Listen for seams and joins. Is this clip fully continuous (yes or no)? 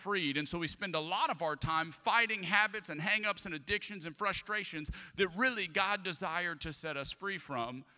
yes